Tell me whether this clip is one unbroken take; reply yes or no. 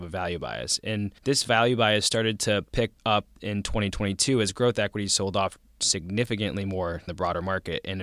no